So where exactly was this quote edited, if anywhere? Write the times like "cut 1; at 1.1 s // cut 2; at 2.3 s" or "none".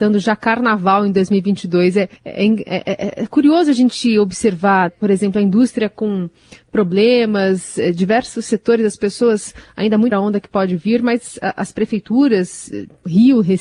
cut 1; at 2.2 s // cut 2; at 4.9 s // cut 3; at 10.1 s